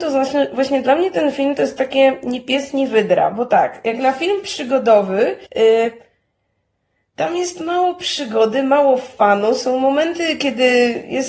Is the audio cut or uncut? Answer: cut